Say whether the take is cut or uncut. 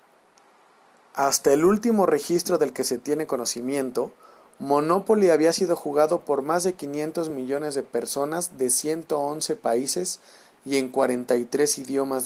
uncut